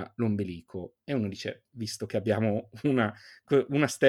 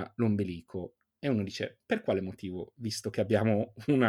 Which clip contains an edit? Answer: first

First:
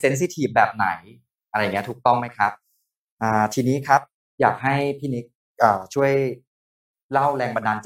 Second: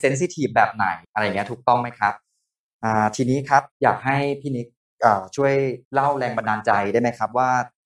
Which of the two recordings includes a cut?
second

